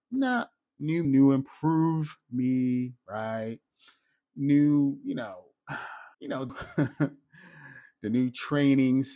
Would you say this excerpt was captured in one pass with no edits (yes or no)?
no